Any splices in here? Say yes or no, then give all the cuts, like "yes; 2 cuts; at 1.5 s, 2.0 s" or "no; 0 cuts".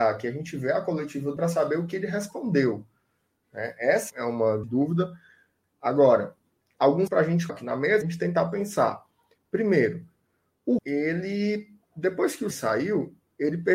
yes; 8 cuts; at 1.4 s, 4.1 s, 4.6 s, 7.1 s, 7.5 s, 8.0 s, 10.8 s, 12.5 s